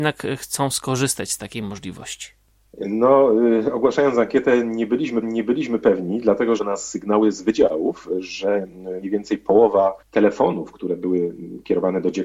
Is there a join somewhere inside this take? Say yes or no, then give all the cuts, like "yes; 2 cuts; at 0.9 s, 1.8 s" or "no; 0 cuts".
yes; 4 cuts; at 5.2 s, 6.6 s, 9.0 s, 10.0 s